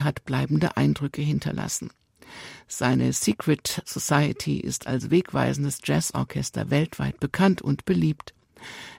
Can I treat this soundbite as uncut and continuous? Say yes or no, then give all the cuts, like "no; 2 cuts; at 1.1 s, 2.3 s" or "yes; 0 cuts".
yes; 0 cuts